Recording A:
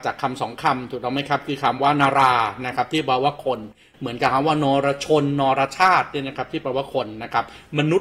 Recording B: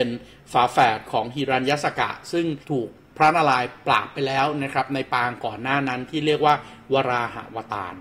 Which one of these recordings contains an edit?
B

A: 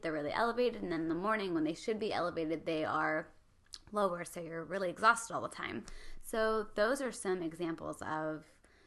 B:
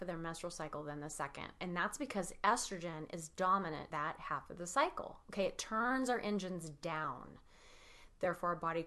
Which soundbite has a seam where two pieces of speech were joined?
B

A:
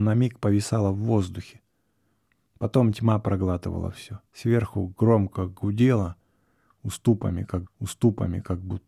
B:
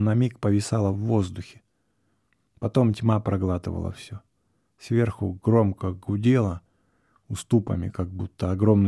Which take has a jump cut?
A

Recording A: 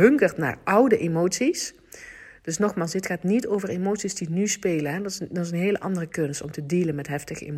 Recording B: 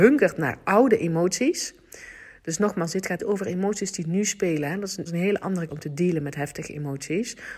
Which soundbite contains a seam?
B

